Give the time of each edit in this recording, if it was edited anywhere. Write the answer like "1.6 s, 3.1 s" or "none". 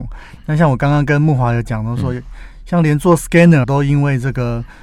3.6 s